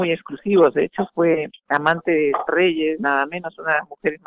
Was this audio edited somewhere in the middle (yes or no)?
yes